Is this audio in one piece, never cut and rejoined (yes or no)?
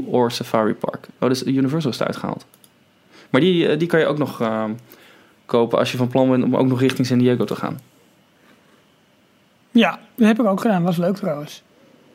yes